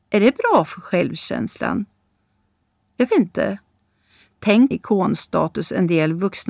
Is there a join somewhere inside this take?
yes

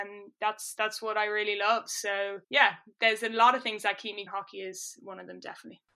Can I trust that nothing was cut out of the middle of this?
no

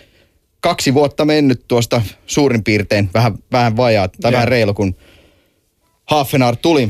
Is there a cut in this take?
no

